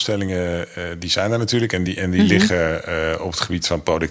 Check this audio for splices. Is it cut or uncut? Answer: uncut